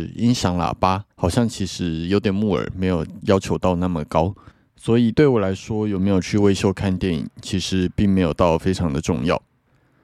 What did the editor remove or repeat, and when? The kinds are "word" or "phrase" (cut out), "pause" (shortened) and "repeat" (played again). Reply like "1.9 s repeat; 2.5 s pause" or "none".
1.1 s pause; 4.5 s pause